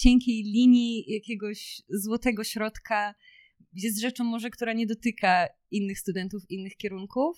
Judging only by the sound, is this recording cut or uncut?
uncut